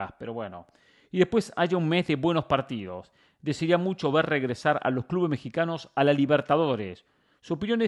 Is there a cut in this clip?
no; 0 cuts

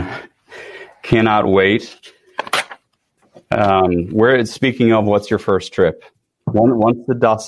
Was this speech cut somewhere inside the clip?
no; 0 cuts

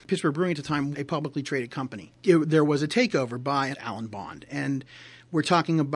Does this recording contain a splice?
yes; 2 cuts; at 0.9 s, 3.7 s

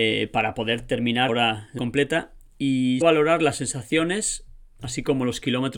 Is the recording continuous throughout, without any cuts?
no; 3 cuts; at 1.3 s, 1.8 s, 3.0 s

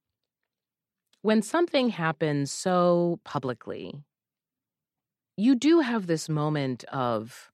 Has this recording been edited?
no; 0 cuts

